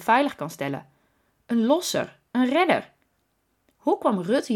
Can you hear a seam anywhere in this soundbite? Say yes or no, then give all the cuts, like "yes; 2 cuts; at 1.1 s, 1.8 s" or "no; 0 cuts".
no; 0 cuts